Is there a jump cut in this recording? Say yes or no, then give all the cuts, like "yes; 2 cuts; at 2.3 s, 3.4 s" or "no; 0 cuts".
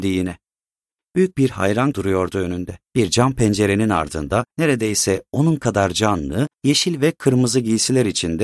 yes; 4 cuts; at 1.9 s, 2.8 s, 4.5 s, 6.5 s